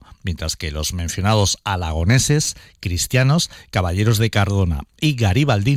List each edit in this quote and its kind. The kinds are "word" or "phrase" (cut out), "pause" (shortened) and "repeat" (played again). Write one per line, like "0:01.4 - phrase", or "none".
none